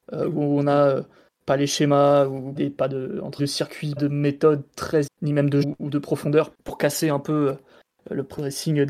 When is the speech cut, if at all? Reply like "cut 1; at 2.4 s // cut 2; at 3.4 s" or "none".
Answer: cut 1; at 2.6 s // cut 2; at 3.4 s // cut 3; at 4.0 s // cut 4; at 5.1 s // cut 5; at 5.6 s // cut 6; at 6.5 s